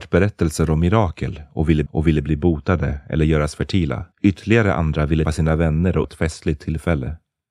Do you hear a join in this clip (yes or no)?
yes